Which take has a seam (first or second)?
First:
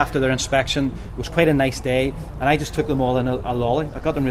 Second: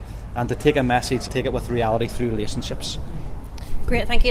second